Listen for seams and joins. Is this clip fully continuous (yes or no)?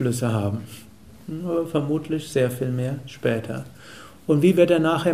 yes